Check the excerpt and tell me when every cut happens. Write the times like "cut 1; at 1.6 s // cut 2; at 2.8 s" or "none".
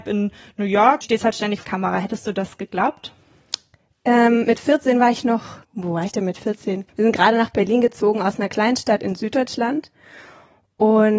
cut 1; at 1.0 s // cut 2; at 1.6 s // cut 3; at 5.6 s // cut 4; at 6.9 s